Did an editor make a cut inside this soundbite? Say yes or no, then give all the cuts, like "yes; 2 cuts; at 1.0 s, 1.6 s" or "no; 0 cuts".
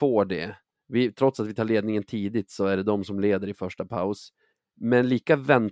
no; 0 cuts